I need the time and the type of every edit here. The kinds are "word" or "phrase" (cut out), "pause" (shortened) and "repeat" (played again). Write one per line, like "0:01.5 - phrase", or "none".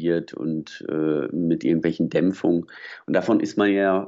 none